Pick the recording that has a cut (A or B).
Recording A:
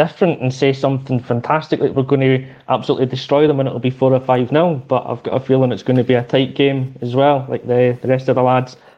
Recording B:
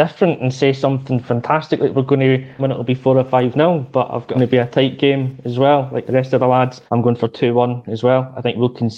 B